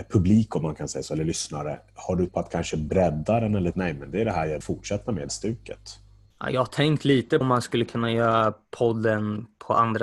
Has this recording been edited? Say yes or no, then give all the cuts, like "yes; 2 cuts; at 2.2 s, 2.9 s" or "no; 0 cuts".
yes; 6 cuts; at 2.3 s, 3.7 s, 4.6 s, 5.3 s, 6.3 s, 7.4 s